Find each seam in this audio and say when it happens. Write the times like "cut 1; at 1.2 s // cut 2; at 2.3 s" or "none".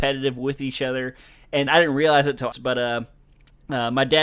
cut 1; at 1.7 s // cut 2; at 2.5 s